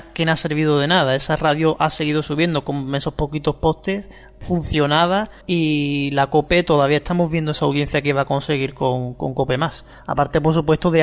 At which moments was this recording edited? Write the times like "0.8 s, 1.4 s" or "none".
5.4 s